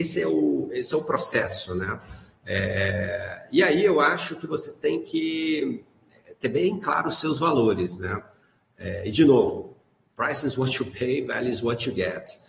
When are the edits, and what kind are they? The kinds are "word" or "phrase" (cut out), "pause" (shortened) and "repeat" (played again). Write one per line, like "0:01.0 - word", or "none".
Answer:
none